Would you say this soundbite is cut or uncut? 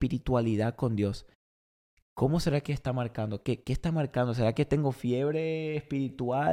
uncut